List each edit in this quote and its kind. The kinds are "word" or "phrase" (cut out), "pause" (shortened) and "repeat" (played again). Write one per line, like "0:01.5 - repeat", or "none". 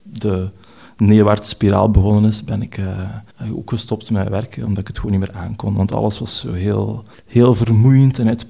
0:03.3 - pause
0:07.1 - pause